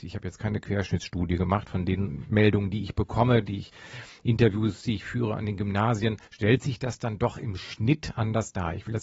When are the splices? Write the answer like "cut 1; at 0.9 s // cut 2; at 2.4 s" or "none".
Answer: cut 1; at 6.2 s